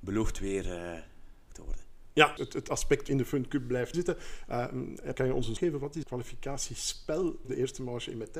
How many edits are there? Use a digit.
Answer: 8